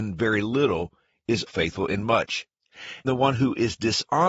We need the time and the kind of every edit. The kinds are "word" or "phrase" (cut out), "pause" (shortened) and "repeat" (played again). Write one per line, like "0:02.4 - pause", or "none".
0:01.5 - word
0:03.0 - word